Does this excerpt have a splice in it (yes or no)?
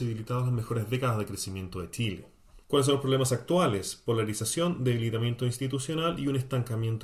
yes